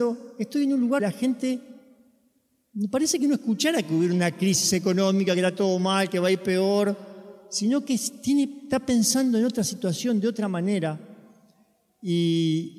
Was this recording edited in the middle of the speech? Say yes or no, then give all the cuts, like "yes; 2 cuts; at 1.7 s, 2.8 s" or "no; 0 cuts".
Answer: yes; 1 cut; at 1.0 s